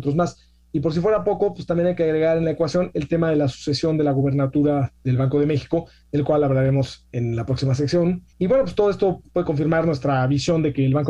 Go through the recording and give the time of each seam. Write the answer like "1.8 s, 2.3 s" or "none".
8.3 s, 9.3 s